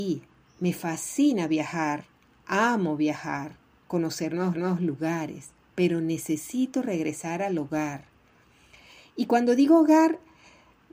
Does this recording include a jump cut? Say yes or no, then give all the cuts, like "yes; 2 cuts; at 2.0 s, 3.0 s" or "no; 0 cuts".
yes; 1 cut; at 4.5 s